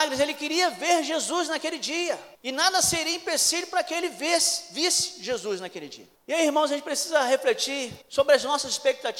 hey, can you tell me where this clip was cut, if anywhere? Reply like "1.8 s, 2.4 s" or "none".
2.3 s, 6.1 s, 8.0 s